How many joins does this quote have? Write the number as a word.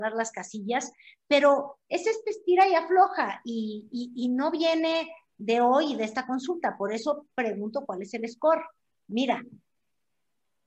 zero